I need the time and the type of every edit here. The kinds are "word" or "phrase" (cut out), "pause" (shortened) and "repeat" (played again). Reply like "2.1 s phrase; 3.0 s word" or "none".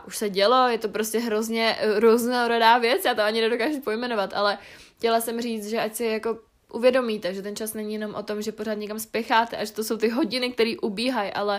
none